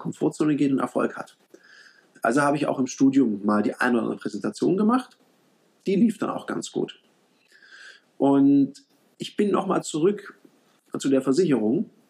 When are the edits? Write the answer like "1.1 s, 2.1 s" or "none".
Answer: none